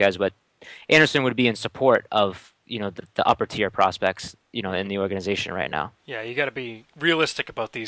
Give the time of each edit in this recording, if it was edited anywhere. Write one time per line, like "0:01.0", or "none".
0:06.0